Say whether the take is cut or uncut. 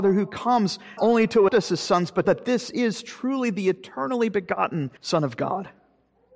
cut